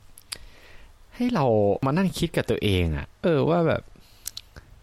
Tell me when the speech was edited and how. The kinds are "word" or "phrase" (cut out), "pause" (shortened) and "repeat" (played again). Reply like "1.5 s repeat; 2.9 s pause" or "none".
3.1 s pause